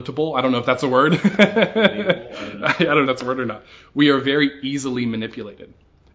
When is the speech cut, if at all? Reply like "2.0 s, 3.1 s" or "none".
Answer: 3.1 s

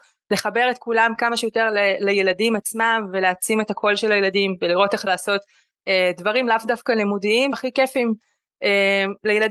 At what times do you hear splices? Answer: 5.1 s, 7.5 s

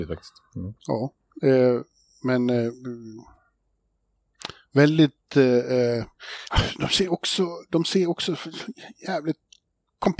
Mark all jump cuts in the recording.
none

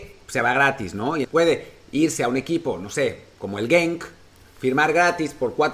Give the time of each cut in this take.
1.2 s

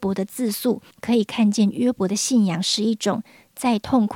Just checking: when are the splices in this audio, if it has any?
0.9 s

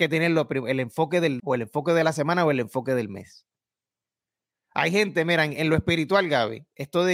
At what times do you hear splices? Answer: 1.4 s

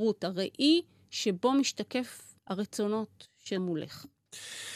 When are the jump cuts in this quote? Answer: 2.4 s, 3.6 s

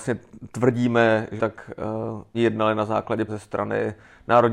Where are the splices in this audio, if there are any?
1.4 s, 2.3 s, 3.3 s

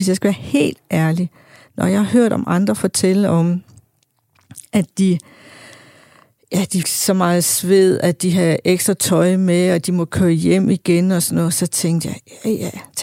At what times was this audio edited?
6.8 s

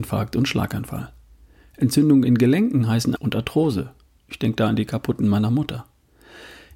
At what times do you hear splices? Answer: 3.2 s, 5.2 s

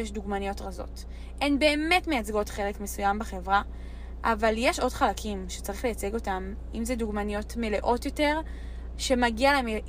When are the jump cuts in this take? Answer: none

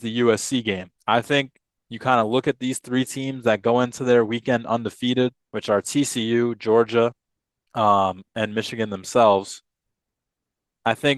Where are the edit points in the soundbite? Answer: 1.0 s, 1.8 s, 5.4 s, 7.3 s

